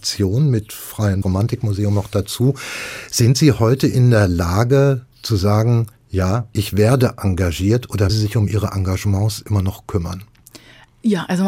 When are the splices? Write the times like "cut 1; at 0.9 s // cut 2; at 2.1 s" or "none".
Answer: cut 1; at 1.2 s // cut 2; at 5.1 s // cut 3; at 8.1 s